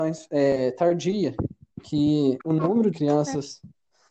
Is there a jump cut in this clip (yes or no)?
yes